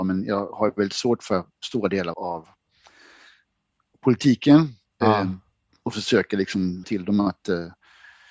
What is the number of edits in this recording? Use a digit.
2